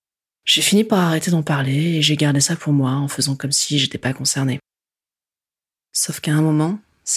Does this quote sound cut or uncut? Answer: uncut